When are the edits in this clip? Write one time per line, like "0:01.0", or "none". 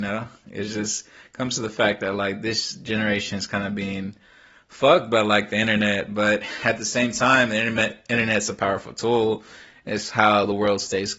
none